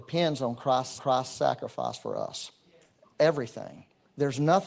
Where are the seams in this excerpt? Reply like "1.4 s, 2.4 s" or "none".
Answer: 1.0 s